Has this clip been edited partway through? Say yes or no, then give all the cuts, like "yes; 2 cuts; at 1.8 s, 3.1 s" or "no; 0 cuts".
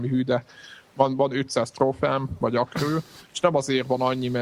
yes; 1 cut; at 3.2 s